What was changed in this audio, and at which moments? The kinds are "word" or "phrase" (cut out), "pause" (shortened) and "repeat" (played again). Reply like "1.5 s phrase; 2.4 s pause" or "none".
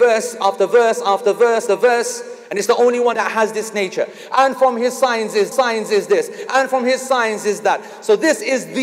1.7 s word; 3.1 s phrase; 5.5 s repeat